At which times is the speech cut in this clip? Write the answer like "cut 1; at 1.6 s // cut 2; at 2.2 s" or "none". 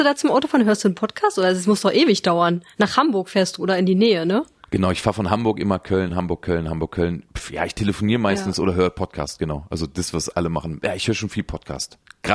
none